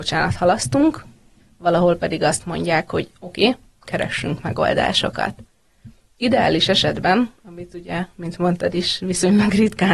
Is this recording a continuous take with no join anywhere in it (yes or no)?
yes